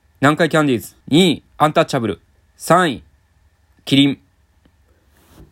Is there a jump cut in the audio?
yes; 3 cuts; at 1.0 s, 1.5 s, 2.3 s

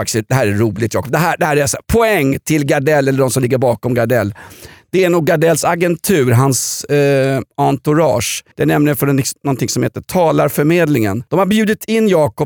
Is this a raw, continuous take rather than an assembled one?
no; 3 cuts; at 1.8 s, 8.5 s, 11.3 s

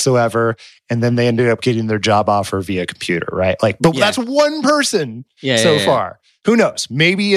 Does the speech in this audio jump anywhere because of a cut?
no; 0 cuts

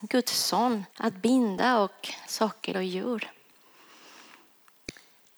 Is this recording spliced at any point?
yes; 3 cuts; at 0.9 s, 2.3 s, 2.7 s

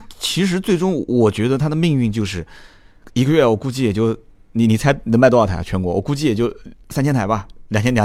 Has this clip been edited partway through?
no; 0 cuts

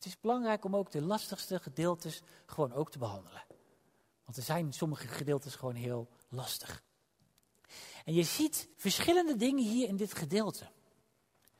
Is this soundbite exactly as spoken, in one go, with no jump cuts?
no; 1 cut; at 8.7 s

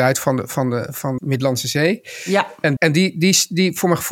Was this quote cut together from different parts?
yes; 2 cuts; at 1.2 s, 2.8 s

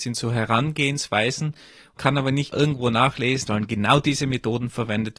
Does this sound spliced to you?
yes; 3 cuts; at 2.0 s, 2.5 s, 3.5 s

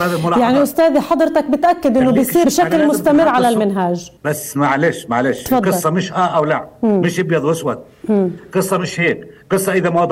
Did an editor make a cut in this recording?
yes; 2 cuts; at 2.4 s, 4.2 s

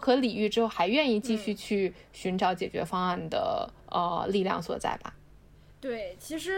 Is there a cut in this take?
yes; 1 cut; at 3.8 s

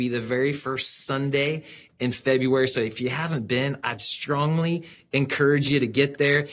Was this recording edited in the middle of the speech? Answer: no; 0 cuts

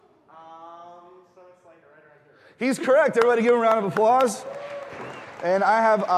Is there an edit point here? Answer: no; 0 cuts

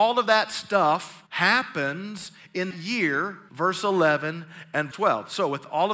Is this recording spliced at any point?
yes; 4 cuts; at 1.3 s, 2.7 s, 3.5 s, 4.9 s

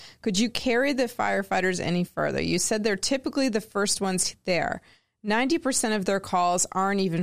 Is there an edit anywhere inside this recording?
no; 0 cuts

